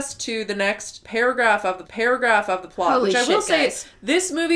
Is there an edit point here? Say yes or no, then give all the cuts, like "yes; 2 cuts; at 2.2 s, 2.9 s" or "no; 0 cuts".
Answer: yes; 1 cut; at 1.8 s